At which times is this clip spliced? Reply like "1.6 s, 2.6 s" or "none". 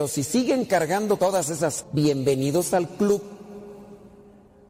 1.2 s, 1.8 s